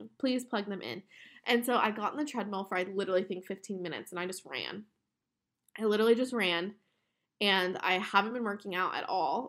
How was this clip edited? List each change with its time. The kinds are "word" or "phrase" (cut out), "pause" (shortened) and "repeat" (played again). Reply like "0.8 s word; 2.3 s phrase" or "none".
none

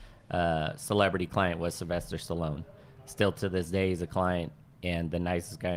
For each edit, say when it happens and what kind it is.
none

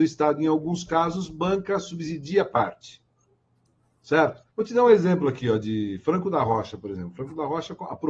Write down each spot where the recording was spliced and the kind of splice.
4.5 s pause

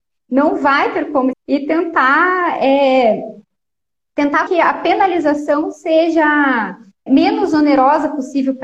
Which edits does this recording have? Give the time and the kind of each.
1.3 s word; 4.5 s word; 7.1 s word

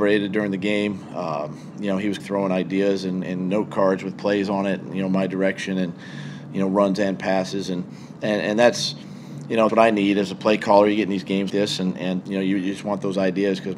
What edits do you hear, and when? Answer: 2.2 s word; 3.2 s word; 9.7 s word; 11.5 s word; 12.2 s word

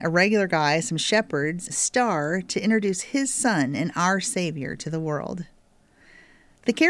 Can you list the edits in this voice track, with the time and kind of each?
1.7 s word

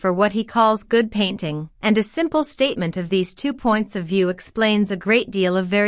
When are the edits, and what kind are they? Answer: 1.7 s pause

